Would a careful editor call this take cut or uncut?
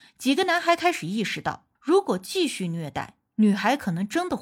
cut